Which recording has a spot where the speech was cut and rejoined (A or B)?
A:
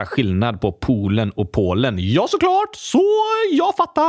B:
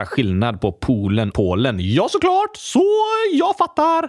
B